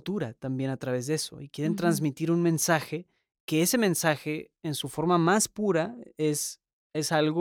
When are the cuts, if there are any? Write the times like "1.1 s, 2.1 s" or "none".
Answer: none